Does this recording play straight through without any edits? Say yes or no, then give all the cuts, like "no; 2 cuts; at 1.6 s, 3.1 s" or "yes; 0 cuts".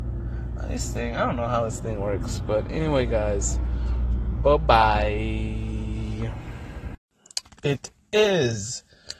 yes; 0 cuts